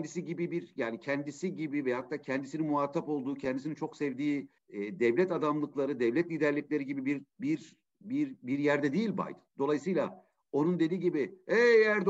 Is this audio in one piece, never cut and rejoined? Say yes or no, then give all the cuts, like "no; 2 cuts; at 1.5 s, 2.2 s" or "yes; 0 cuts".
no; 3 cuts; at 4.6 s, 7.3 s, 9.5 s